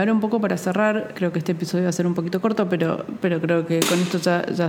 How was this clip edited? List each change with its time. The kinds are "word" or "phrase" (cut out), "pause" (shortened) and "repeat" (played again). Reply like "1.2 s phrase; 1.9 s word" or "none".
1.1 s word